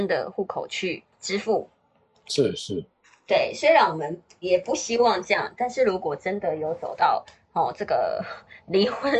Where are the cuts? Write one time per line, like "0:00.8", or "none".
0:01.1